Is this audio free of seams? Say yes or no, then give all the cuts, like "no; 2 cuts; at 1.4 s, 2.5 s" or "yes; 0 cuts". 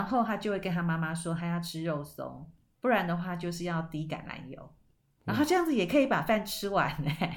yes; 0 cuts